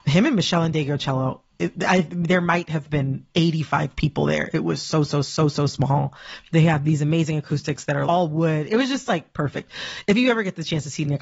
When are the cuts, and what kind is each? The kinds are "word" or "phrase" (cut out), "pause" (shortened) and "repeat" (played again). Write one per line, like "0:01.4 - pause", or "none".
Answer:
0:05.2 - repeat
0:08.1 - word